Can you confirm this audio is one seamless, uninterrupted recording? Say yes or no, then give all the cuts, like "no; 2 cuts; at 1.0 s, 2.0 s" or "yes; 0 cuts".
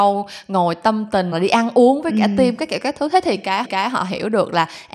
no; 2 cuts; at 1.3 s, 3.6 s